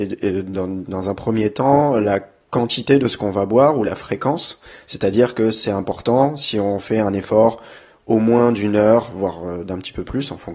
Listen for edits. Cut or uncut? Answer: uncut